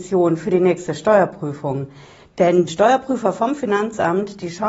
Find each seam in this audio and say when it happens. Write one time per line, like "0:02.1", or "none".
0:02.7